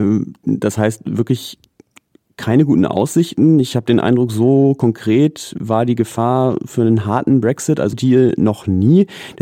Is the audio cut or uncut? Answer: cut